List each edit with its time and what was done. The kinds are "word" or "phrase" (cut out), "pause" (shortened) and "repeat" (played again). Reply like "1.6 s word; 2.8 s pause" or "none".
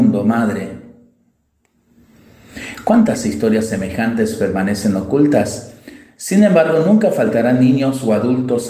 none